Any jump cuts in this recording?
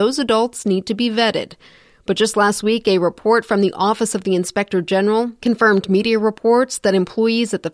no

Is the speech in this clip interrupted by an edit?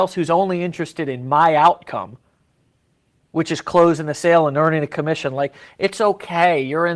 no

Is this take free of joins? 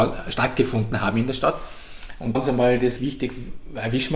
no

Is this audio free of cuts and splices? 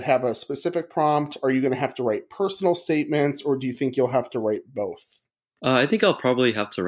yes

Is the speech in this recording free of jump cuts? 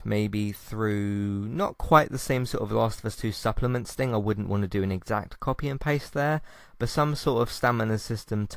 yes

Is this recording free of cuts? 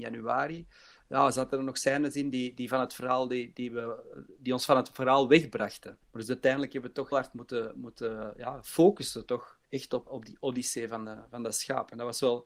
no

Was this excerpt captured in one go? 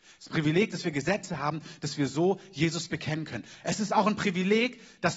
yes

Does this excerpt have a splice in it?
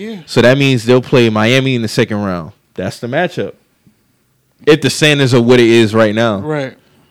no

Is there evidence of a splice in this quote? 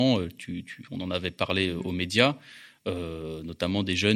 no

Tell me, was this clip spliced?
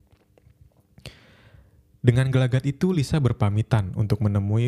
no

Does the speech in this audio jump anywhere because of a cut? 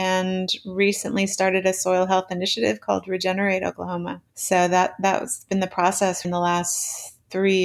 yes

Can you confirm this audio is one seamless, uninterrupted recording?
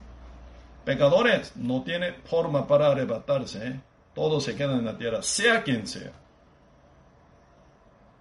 yes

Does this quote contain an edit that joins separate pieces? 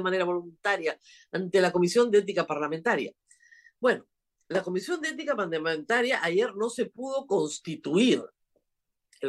no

